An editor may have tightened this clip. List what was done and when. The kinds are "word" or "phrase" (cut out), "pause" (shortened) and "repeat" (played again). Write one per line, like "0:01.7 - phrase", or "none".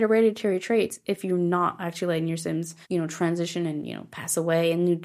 0:02.8 - pause